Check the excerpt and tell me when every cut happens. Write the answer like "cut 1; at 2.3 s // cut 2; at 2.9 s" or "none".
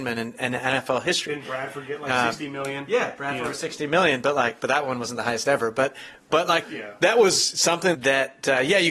cut 1; at 6.6 s // cut 2; at 7.9 s